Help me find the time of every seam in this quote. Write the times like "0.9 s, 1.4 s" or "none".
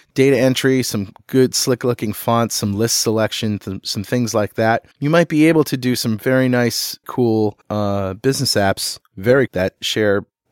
4.9 s, 7.0 s, 7.6 s, 9.5 s

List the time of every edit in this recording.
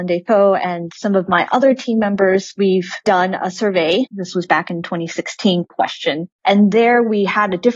4.1 s, 5.7 s

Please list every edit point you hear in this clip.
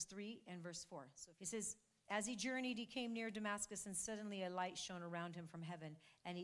none

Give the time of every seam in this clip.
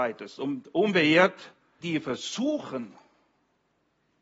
1.8 s

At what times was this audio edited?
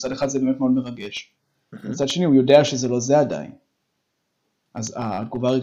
none

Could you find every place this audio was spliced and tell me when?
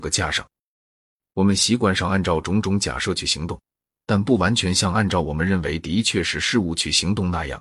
none

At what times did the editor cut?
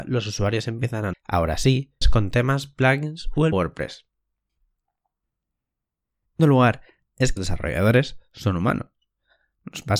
1.1 s, 2.0 s, 3.5 s, 6.4 s, 7.4 s

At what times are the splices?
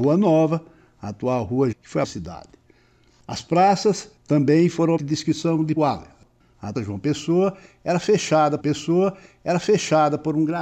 1.7 s, 2.0 s, 4.2 s, 5.0 s, 5.8 s, 6.7 s, 8.6 s

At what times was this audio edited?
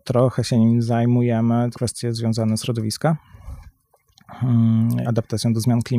1.7 s, 2.6 s, 5.0 s

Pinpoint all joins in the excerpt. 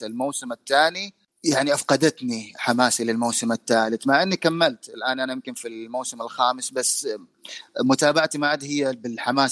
none

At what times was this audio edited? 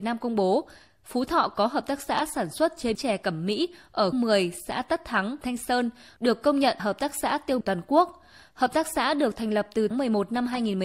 2.9 s, 4.1 s, 5.4 s, 6.8 s, 7.6 s, 9.9 s

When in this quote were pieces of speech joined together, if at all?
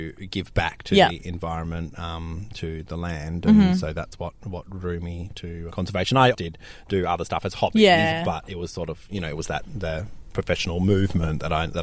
5.7 s, 6.3 s

